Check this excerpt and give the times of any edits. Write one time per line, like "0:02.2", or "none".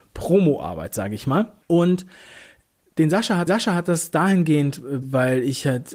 0:01.6
0:03.5
0:05.0